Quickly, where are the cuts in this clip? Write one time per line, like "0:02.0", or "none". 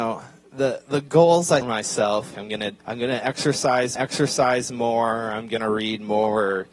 0:01.6
0:02.3
0:02.8
0:04.0